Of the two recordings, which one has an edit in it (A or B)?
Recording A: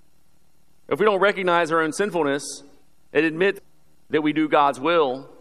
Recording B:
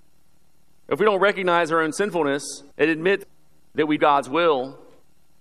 B